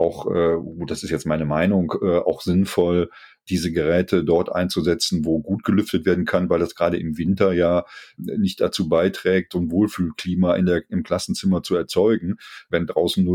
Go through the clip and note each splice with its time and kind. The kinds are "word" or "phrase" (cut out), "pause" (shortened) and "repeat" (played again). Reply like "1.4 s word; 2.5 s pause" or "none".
none